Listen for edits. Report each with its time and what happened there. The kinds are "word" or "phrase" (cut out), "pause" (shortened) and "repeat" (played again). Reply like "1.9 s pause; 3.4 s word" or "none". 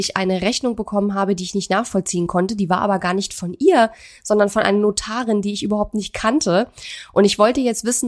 none

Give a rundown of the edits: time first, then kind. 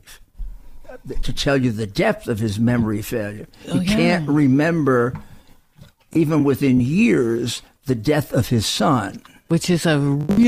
none

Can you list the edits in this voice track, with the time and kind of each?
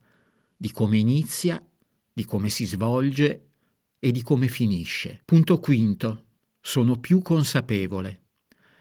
5.2 s pause

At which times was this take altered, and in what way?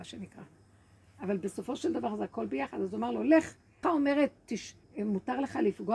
3.8 s word; 4.8 s pause

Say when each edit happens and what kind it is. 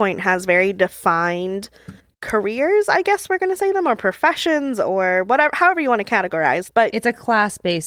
2.0 s pause; 6.7 s word

